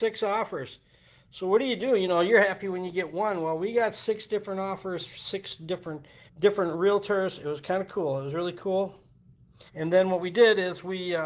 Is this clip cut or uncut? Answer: cut